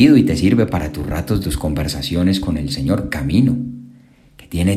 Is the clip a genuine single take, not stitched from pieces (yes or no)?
no